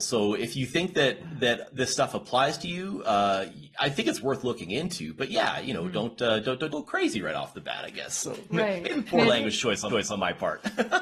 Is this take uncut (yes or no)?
no